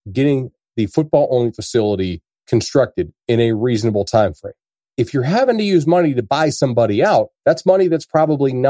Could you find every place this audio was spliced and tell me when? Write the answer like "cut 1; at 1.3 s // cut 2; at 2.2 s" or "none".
cut 1; at 2.3 s // cut 2; at 4.7 s // cut 3; at 7.4 s